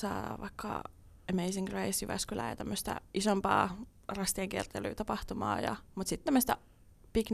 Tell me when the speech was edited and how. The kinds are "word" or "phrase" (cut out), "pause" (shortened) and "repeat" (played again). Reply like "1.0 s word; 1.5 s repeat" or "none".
6.3 s word

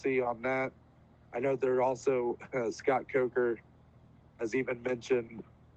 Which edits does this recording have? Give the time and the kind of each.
none

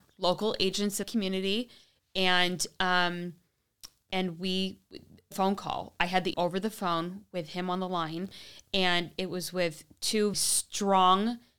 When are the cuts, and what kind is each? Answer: 1.0 s word; 5.3 s phrase; 6.3 s word; 10.3 s word

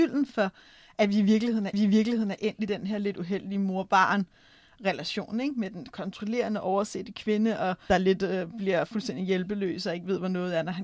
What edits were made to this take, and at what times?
1.7 s repeat; 7.9 s phrase

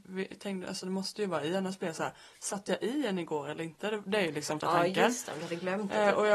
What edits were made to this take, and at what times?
4.6 s word

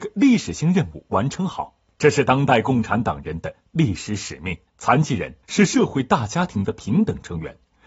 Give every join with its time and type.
4.7 s pause; 5.4 s pause

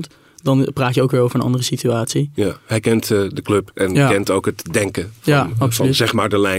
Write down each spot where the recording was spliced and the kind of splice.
none

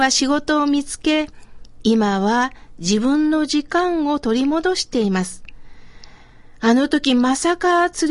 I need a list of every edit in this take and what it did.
none

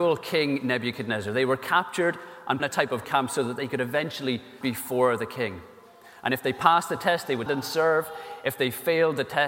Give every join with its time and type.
2.6 s phrase; 3.0 s word; 4.6 s word; 7.5 s word

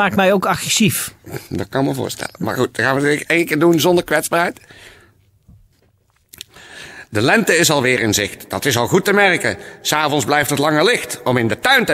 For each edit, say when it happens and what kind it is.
1.5 s pause

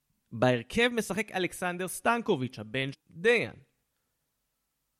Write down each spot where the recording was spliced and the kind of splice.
2.9 s word

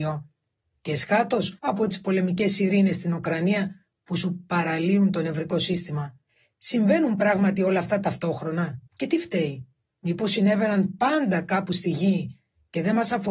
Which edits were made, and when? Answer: 1.6 s pause; 6.3 s pause; 8.9 s pause; 9.9 s pause

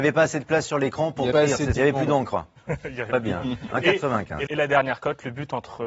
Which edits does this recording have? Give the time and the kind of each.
1.3 s word; 1.8 s phrase; 4.5 s word

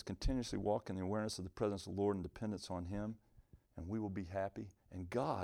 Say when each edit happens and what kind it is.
3.6 s pause

